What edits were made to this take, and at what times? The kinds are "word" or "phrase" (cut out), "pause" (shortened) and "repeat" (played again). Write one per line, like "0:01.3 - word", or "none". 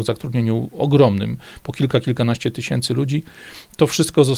none